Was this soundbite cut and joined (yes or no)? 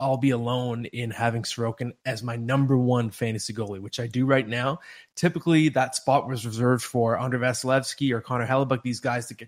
no